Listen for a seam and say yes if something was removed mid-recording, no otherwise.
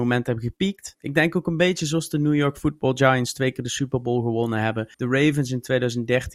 yes